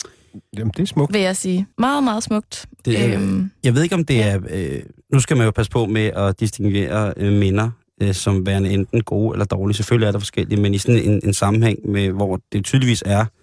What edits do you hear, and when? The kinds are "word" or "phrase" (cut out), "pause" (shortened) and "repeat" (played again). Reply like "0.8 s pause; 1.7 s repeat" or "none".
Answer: 1.7 s pause